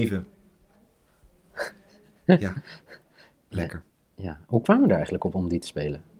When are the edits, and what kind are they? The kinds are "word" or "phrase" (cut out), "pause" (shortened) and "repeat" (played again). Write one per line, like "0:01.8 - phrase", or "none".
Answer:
none